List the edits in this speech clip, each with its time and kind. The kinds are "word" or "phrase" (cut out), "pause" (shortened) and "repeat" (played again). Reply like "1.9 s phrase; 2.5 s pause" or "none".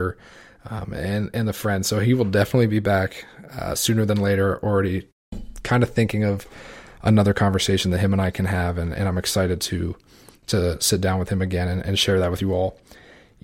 none